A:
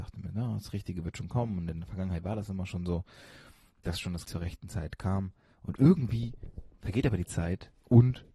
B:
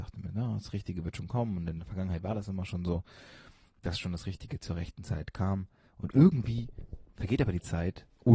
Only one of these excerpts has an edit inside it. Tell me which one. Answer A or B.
A